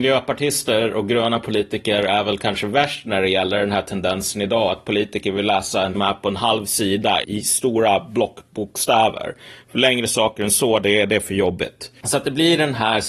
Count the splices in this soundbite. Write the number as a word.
two